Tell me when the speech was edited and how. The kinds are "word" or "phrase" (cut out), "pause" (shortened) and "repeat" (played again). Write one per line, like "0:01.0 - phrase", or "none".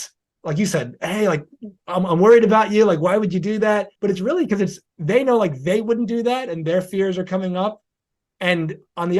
0:04.0 - pause